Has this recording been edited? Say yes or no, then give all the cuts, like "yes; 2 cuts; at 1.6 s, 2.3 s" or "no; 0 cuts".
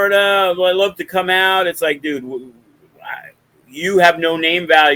no; 0 cuts